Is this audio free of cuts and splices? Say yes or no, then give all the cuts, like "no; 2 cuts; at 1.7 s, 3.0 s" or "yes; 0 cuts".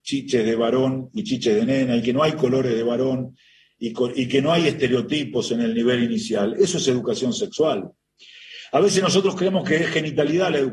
yes; 0 cuts